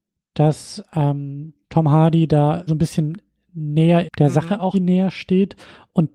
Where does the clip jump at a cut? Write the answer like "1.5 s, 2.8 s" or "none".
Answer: 1.6 s, 2.7 s, 4.0 s, 4.7 s

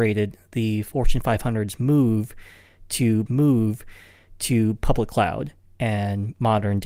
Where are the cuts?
3.3 s

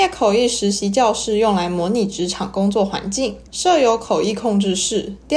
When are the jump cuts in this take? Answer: 3.5 s

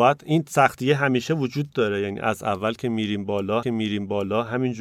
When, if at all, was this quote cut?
3.6 s

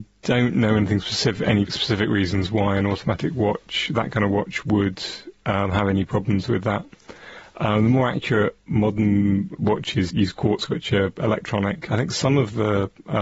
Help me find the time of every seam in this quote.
1.7 s, 10.1 s, 10.7 s

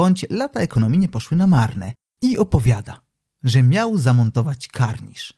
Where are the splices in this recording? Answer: none

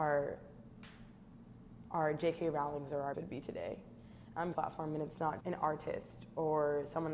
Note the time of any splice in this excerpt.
3.1 s, 4.5 s, 5.4 s

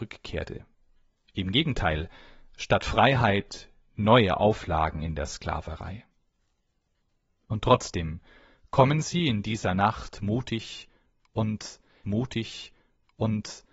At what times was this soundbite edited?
12.0 s

